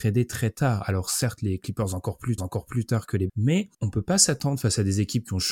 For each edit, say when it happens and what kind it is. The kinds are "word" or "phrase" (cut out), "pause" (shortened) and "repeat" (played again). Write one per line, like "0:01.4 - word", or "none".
0:02.4 - repeat
0:03.3 - word
0:03.7 - pause